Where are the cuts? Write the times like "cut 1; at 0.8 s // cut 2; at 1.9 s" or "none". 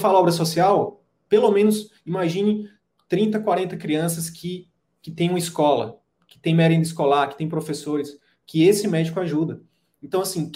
none